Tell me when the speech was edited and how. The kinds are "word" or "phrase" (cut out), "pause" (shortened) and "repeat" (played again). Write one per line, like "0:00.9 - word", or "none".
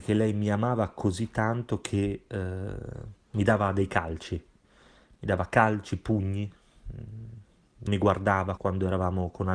0:03.2 - pause
0:07.9 - word
0:08.6 - word